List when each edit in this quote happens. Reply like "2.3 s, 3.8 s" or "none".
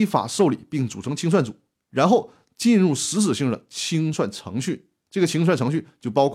none